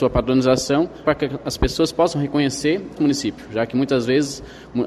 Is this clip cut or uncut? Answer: cut